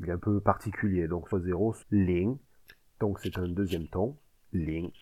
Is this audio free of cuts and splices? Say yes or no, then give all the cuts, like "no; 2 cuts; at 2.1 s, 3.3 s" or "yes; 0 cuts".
no; 2 cuts; at 1.3 s, 1.8 s